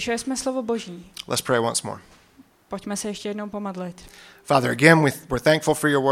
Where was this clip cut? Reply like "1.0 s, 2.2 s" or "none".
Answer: none